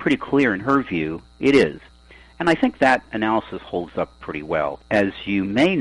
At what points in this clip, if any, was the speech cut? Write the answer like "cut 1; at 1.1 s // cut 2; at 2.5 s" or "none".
none